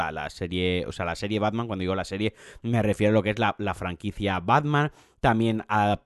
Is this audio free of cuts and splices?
yes; 0 cuts

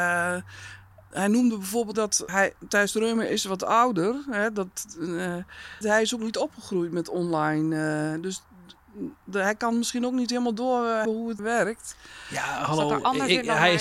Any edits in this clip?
yes; 6 cuts; at 1.1 s, 1.9 s, 2.3 s, 5.8 s, 11.0 s, 11.4 s

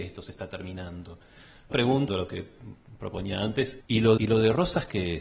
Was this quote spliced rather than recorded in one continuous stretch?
yes; 4 cuts; at 1.7 s, 2.1 s, 3.8 s, 4.2 s

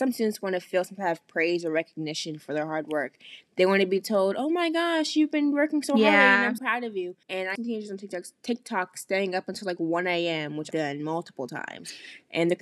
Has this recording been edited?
yes; 4 cuts; at 6.6 s, 7.2 s, 7.6 s, 10.7 s

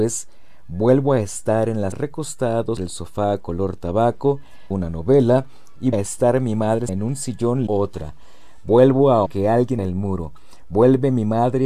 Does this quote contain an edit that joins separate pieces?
yes; 8 cuts; at 1.9 s, 2.8 s, 4.7 s, 5.9 s, 6.9 s, 7.7 s, 9.3 s, 9.8 s

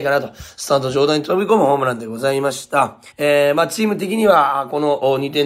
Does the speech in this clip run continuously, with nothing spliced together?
no; 1 cut; at 3.1 s

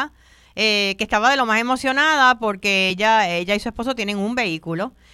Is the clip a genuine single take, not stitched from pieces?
yes; 0 cuts

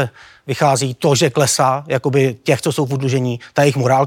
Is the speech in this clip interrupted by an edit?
no; 0 cuts

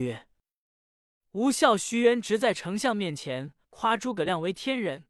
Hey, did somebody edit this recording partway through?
yes; 1 cut; at 3.6 s

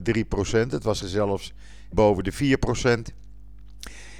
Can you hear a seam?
yes; 2 cuts; at 1.0 s, 1.9 s

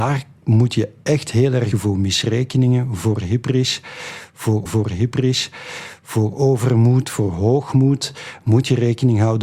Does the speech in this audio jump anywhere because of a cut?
yes; 2 cuts; at 1.7 s, 4.7 s

